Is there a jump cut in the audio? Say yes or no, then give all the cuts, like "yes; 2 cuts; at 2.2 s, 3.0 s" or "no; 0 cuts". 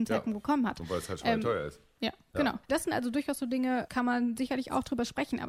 yes; 1 cut; at 2.6 s